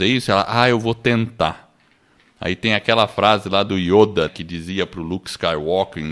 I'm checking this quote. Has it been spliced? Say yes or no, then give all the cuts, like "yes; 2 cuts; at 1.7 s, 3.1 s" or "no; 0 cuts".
yes; 1 cut; at 4.3 s